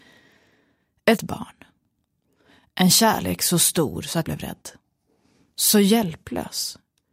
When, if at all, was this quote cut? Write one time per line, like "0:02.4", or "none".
0:01.2
0:04.2